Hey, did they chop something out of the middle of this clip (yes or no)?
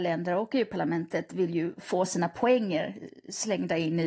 no